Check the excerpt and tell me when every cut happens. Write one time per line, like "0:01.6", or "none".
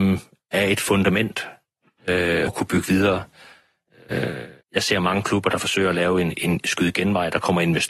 0:02.5
0:04.6